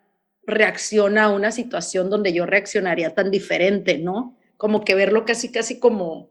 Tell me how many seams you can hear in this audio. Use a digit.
0